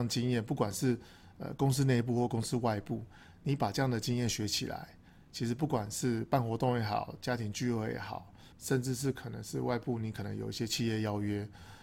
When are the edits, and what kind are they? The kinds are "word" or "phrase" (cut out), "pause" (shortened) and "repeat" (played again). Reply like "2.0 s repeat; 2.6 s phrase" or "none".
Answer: 8.5 s pause